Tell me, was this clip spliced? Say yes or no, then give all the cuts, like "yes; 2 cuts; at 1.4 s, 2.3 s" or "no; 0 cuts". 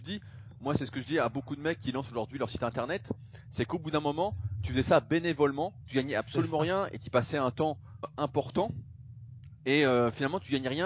yes; 2 cuts; at 8.0 s, 9.6 s